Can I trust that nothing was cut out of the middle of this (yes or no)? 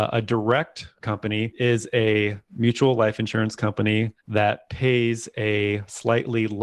no